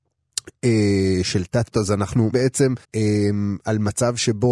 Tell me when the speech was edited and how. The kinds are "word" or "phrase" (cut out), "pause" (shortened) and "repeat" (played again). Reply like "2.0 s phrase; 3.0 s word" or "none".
1.7 s word; 2.3 s word; 2.8 s pause